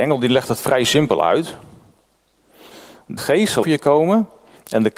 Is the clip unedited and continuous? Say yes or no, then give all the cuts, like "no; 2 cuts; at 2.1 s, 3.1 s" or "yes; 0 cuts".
no; 2 cuts; at 3.2 s, 3.6 s